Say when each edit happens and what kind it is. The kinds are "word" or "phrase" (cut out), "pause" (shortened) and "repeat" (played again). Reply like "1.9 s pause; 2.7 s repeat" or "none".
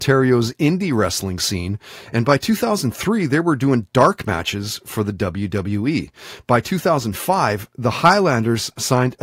none